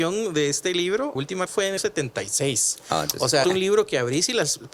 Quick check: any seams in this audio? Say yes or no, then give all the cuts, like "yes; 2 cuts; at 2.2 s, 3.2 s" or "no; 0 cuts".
yes; 4 cuts; at 1.2 s, 1.5 s, 1.8 s, 3.4 s